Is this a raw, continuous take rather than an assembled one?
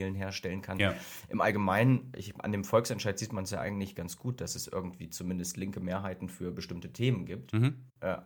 yes; 0 cuts

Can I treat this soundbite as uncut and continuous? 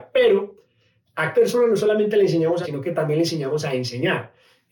no; 2 cuts; at 1.3 s, 2.6 s

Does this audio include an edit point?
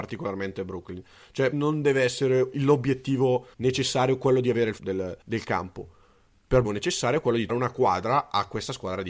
yes; 7 cuts; at 1.5 s, 2.5 s, 3.5 s, 4.8 s, 5.2 s, 6.6 s, 7.5 s

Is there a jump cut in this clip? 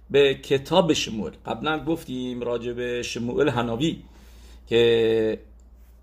no; 0 cuts

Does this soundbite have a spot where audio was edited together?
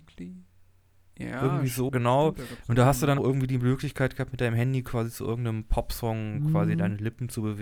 yes; 2 cuts; at 1.9 s, 3.2 s

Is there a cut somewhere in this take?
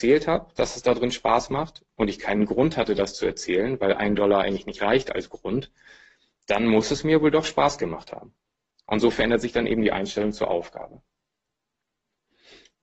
no; 0 cuts

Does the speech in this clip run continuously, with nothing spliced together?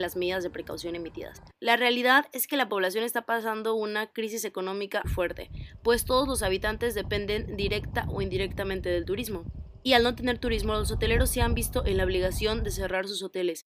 no; 1 cut; at 5.0 s

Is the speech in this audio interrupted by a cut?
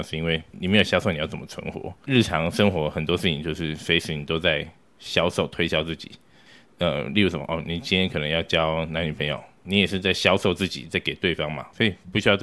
no; 0 cuts

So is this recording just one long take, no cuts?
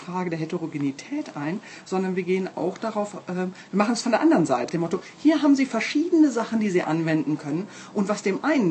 no; 1 cut; at 4.7 s

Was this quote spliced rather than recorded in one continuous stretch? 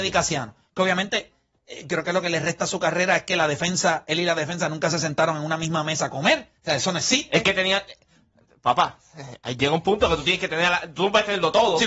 yes; 1 cut; at 6.6 s

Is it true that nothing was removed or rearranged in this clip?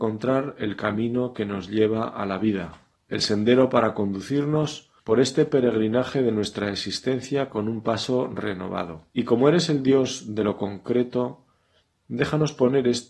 no; 3 cuts; at 3.0 s, 5.0 s, 9.1 s

